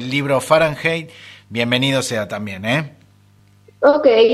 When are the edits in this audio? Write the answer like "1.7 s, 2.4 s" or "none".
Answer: 3.4 s